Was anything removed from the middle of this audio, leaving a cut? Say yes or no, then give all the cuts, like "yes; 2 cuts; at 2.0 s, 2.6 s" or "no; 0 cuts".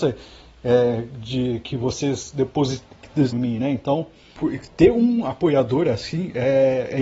yes; 2 cuts; at 3.3 s, 4.4 s